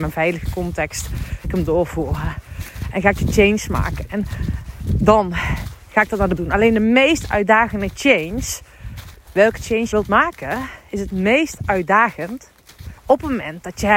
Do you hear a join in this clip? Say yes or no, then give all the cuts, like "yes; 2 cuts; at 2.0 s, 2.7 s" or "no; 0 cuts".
yes; 4 cuts; at 1.4 s, 6.4 s, 9.9 s, 13.0 s